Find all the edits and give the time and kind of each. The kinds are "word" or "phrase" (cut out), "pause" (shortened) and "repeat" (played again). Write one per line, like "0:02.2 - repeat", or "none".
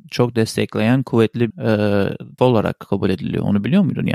0:01.5 - word
0:02.4 - word